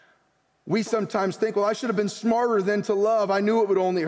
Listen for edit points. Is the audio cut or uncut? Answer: uncut